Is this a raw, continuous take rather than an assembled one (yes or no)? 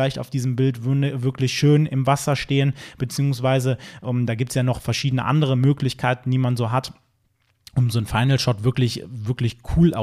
yes